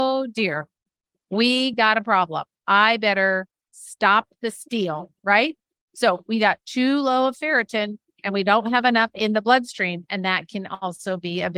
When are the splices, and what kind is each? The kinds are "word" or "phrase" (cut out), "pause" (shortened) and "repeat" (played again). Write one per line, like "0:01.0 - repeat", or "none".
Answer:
none